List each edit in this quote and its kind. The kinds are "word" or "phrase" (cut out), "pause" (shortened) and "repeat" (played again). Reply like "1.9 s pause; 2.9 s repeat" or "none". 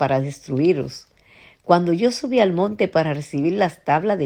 none